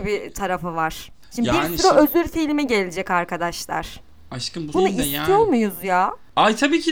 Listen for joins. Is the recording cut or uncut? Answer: cut